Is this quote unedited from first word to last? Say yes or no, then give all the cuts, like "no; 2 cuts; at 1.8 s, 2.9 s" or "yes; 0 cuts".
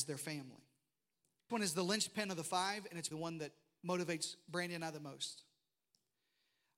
no; 2 cuts; at 1.5 s, 3.1 s